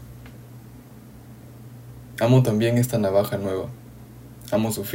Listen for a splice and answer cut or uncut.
uncut